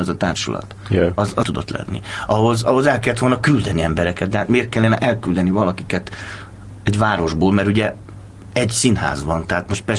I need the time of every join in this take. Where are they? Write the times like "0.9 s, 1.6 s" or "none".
1.4 s